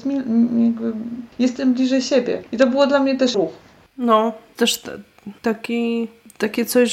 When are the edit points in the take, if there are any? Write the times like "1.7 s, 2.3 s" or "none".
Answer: 1.3 s, 2.5 s, 3.3 s, 4.6 s, 5.4 s